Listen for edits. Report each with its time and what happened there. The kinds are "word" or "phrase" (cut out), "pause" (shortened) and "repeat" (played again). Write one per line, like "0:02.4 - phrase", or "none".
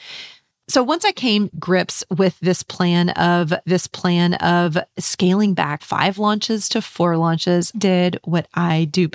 0:01.5 - word
0:03.6 - repeat
0:05.8 - word
0:07.7 - word